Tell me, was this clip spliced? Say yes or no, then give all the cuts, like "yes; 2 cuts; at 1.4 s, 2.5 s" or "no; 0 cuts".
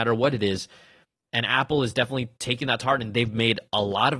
no; 0 cuts